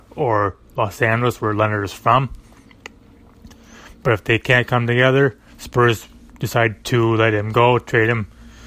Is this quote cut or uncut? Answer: uncut